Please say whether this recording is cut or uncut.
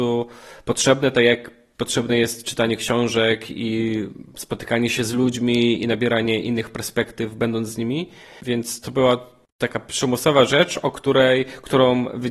uncut